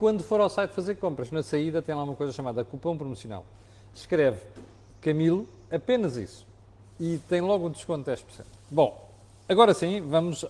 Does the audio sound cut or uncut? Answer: uncut